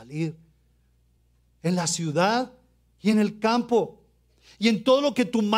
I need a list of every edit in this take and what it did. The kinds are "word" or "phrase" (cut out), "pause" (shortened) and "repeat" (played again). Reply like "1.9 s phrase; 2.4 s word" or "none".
none